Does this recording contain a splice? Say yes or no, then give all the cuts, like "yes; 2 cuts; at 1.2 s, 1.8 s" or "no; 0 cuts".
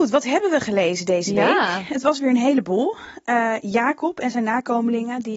no; 0 cuts